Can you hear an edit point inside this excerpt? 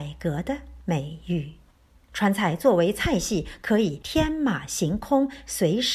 no; 0 cuts

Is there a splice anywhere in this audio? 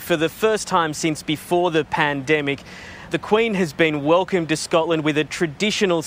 yes; 1 cut; at 3.1 s

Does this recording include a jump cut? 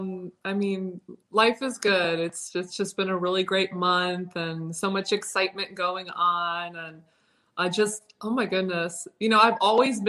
no; 0 cuts

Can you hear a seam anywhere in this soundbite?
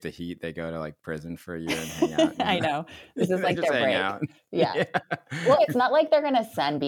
yes; 1 cut; at 5.6 s

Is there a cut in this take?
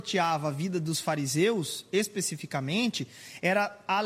no; 0 cuts

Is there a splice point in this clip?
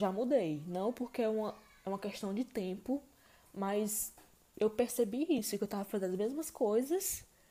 no; 0 cuts

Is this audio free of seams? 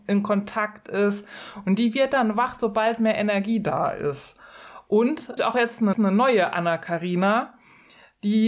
no; 2 cuts; at 5.4 s, 5.9 s

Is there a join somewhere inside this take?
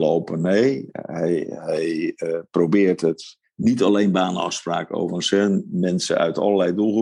no; 0 cuts

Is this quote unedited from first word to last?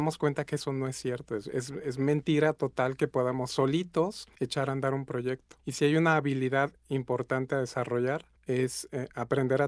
no; 3 cuts; at 4.3 s, 5.6 s, 8.4 s

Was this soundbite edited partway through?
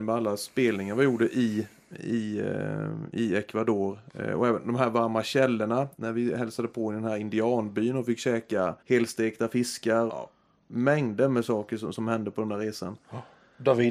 yes; 3 cuts; at 5.9 s, 8.8 s, 10.1 s

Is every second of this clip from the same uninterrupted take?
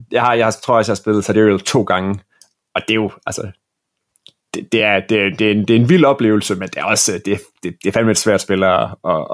yes; 0 cuts

